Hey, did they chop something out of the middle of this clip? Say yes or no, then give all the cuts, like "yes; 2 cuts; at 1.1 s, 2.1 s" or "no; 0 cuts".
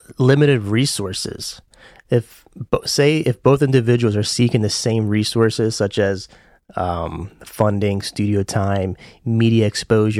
no; 0 cuts